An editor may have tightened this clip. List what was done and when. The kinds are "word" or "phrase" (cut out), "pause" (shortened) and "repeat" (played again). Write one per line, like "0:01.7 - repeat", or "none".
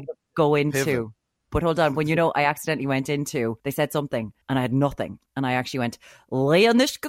0:03.6 - pause
0:04.4 - pause